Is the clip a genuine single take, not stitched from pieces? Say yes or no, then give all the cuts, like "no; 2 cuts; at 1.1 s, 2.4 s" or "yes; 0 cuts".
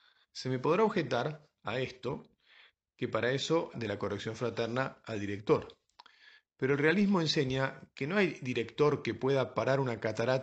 no; 1 cut; at 3.7 s